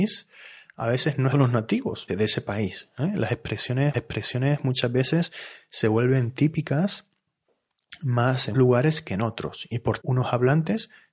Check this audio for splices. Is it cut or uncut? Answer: cut